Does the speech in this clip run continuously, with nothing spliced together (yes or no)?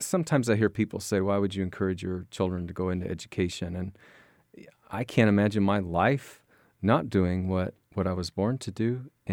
yes